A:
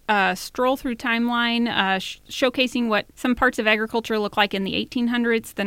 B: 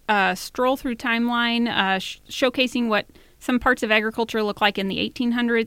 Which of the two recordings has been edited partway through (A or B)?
A